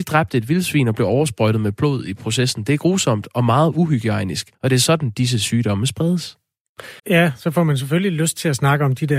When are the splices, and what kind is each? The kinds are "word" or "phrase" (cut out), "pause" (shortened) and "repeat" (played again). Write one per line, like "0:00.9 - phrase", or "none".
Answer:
0:04.5 - pause
0:07.0 - pause